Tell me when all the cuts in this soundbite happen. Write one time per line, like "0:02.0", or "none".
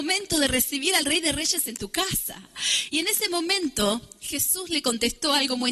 none